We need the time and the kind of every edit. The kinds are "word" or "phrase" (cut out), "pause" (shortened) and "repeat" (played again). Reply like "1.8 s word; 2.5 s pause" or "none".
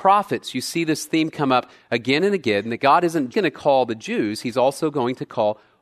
3.3 s word